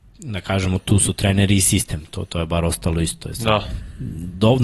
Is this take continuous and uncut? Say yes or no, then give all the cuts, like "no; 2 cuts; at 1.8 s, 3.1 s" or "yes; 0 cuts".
yes; 0 cuts